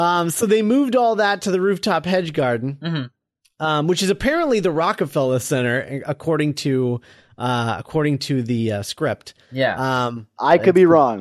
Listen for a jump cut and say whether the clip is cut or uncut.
uncut